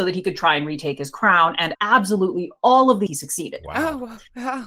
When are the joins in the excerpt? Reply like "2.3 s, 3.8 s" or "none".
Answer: 1.7 s, 3.1 s